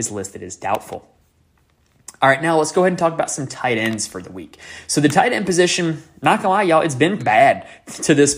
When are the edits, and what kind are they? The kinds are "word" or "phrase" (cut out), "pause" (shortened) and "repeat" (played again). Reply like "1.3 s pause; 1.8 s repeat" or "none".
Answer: 7.2 s word